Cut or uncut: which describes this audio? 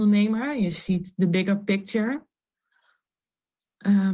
uncut